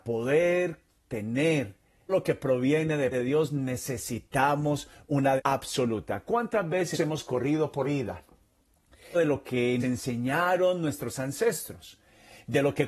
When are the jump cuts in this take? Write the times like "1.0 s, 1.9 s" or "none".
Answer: 2.1 s, 3.1 s, 5.4 s, 6.9 s, 7.8 s, 9.1 s, 9.8 s